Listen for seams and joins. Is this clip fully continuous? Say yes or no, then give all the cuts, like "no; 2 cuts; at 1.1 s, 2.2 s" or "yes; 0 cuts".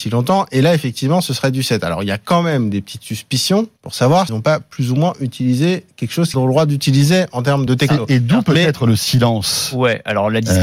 no; 4 cuts; at 3.8 s, 4.3 s, 6.3 s, 7.7 s